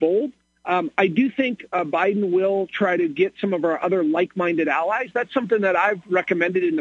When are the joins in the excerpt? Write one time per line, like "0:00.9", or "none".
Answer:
none